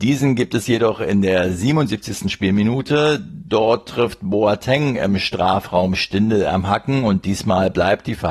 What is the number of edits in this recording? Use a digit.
0